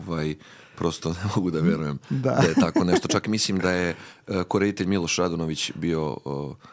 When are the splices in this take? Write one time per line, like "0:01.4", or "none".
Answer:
none